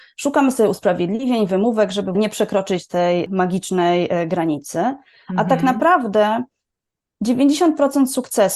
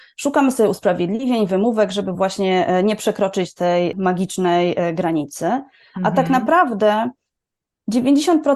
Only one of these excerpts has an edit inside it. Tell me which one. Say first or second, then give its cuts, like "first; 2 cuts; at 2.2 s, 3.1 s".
first; 1 cut; at 2.1 s